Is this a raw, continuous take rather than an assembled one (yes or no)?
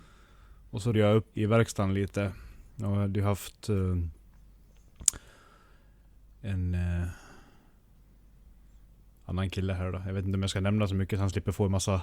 no